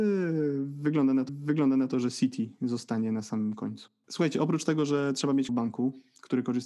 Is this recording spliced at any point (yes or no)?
yes